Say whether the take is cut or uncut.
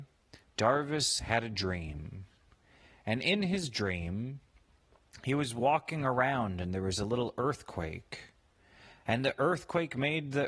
uncut